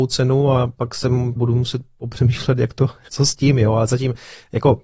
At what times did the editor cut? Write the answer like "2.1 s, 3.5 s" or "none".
1.4 s, 3.1 s

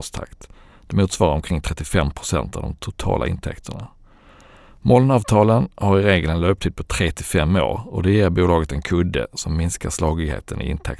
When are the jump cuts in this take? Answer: none

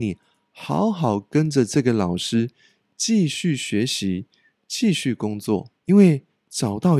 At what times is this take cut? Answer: 5.8 s

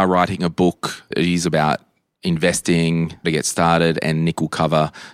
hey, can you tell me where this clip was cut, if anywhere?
1.1 s, 3.2 s

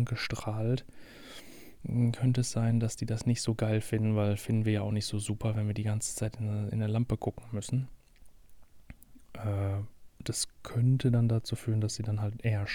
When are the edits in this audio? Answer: none

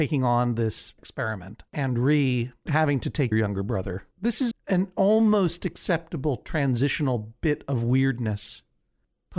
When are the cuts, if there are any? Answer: 1.0 s, 1.7 s, 2.7 s, 3.3 s, 4.1 s, 4.5 s

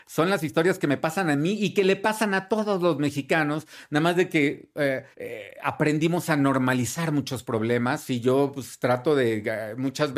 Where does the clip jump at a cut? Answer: 5.1 s

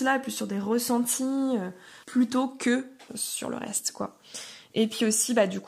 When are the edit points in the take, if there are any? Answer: 2.0 s, 3.1 s

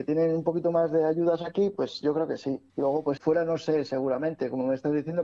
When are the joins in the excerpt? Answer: 2.7 s, 3.2 s

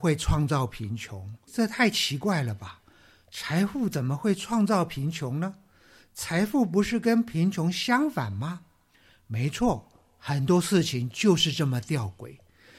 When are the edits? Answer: 1.5 s

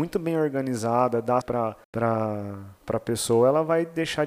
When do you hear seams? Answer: 1.4 s, 1.8 s

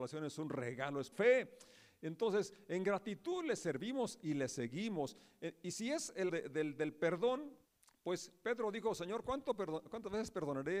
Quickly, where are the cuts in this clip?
1.1 s, 6.3 s, 7.7 s

